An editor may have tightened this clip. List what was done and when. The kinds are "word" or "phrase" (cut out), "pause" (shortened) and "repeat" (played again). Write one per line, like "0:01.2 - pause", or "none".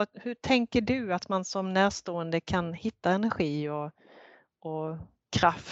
none